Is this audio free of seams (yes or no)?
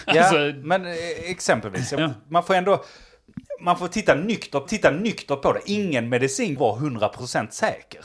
no